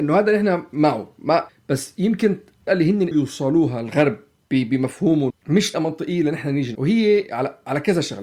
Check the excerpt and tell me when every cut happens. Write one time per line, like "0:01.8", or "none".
0:01.5
0:02.7
0:03.1
0:05.3
0:05.7
0:06.7

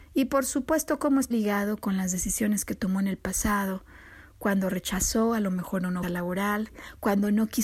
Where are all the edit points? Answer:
0:01.3
0:06.0

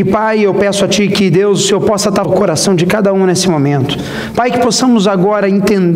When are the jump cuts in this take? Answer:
0:02.2

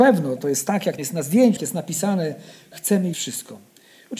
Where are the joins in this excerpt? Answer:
0:01.0
0:01.6
0:03.1

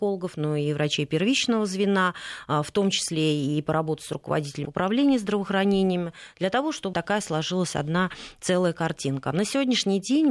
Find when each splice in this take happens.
0:04.6
0:06.9

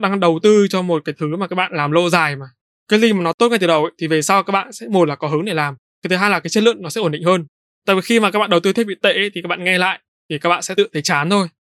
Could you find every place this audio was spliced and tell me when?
none

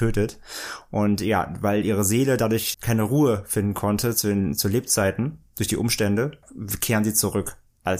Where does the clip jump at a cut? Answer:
0:02.7

